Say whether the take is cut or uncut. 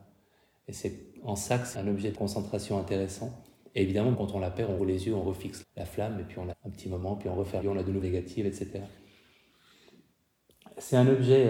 cut